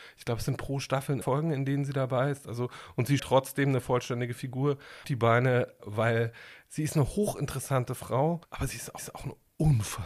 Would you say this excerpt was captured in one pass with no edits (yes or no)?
no